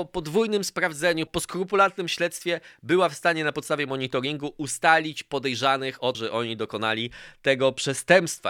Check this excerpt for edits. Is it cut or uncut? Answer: cut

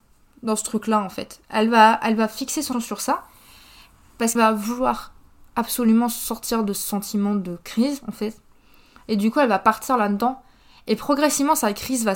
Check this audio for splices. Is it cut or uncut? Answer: cut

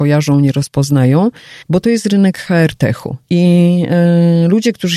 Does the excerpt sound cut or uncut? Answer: cut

